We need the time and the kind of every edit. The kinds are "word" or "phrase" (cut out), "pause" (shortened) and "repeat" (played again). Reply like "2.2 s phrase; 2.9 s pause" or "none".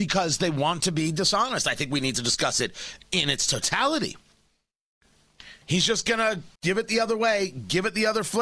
5.6 s pause; 6.5 s pause